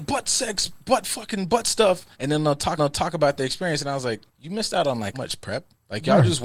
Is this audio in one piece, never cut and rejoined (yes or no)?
no